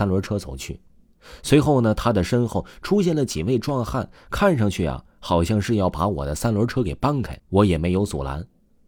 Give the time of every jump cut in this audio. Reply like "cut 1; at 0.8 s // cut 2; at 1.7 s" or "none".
cut 1; at 7.4 s